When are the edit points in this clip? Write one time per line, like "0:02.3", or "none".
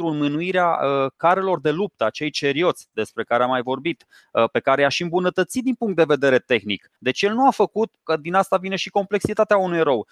0:07.0